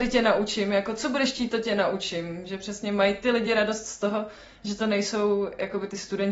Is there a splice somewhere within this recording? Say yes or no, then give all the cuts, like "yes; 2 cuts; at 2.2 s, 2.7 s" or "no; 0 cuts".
no; 0 cuts